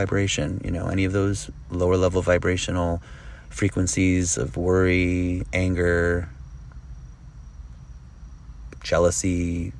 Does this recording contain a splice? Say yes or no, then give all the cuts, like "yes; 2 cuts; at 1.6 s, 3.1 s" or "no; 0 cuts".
yes; 1 cut; at 8.8 s